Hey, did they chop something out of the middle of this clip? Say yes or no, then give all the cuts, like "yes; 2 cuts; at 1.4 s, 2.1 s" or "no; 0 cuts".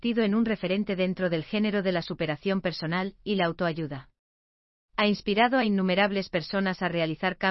no; 0 cuts